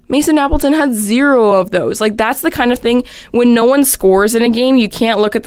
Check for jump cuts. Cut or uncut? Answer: uncut